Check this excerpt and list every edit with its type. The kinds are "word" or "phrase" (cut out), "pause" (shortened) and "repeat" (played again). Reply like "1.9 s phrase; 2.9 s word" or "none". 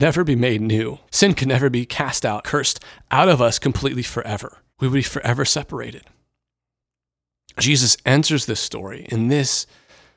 1.1 s pause; 2.4 s word; 4.7 s pause; 7.6 s word